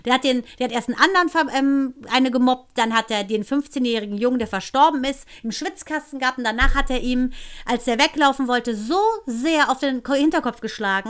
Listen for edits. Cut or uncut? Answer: uncut